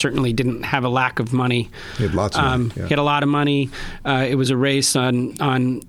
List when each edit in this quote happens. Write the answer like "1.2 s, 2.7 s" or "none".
none